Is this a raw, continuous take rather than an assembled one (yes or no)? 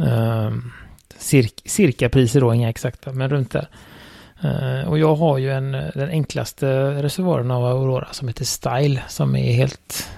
yes